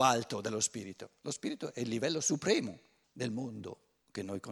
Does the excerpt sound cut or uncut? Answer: cut